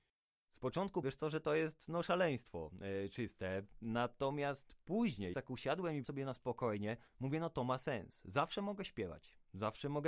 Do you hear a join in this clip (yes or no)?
yes